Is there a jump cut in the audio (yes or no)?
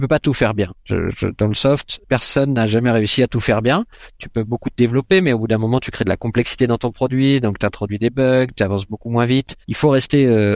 yes